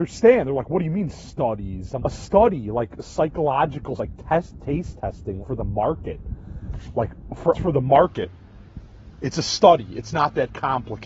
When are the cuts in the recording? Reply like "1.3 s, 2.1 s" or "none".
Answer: 2.0 s, 4.0 s, 5.4 s, 7.5 s